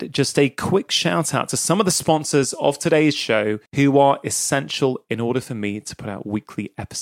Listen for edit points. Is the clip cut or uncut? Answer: cut